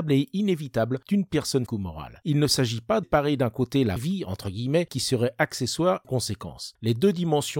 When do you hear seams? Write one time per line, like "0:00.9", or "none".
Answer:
0:01.7
0:03.0
0:04.0
0:04.9
0:06.0